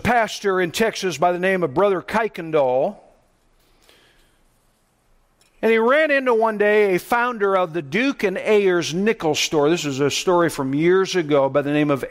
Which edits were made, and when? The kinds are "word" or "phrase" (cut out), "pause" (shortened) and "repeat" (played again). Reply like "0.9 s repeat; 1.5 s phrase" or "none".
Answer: none